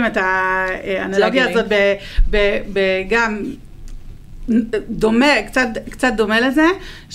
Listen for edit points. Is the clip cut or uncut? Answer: uncut